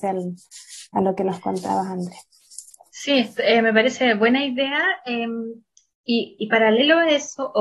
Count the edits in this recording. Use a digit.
0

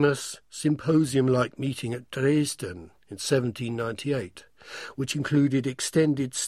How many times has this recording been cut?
1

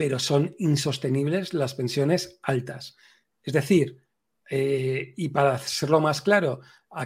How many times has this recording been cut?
0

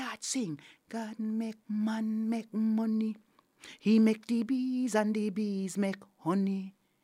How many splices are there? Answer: 1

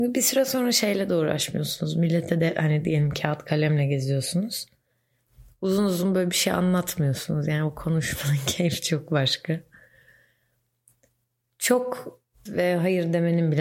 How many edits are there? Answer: 1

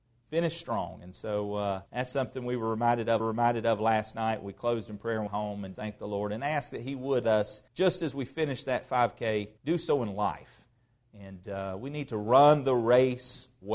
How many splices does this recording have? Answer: 7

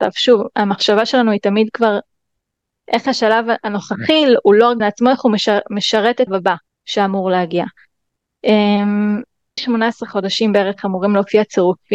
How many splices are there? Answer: 4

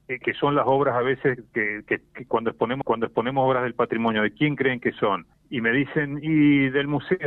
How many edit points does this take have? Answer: 2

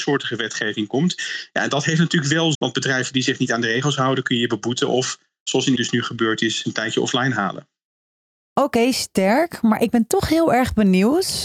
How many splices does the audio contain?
3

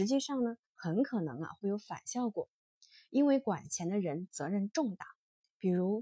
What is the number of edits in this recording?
0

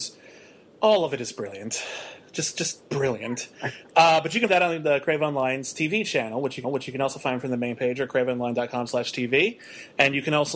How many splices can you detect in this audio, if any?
2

